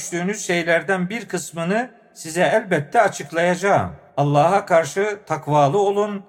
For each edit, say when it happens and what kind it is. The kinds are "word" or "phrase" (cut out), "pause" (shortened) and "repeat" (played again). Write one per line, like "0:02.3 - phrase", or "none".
0:04.1 - pause